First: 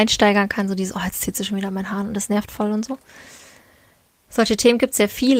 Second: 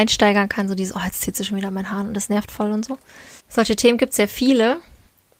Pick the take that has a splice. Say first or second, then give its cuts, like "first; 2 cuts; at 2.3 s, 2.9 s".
second; 1 cut; at 3.4 s